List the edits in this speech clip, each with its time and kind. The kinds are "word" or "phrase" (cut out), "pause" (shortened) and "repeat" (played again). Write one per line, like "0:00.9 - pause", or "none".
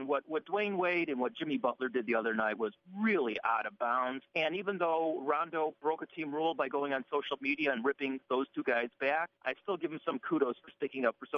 0:04.3 - pause
0:09.3 - pause